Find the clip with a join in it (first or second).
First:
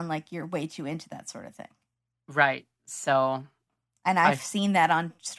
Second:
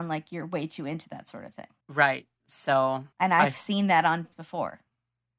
second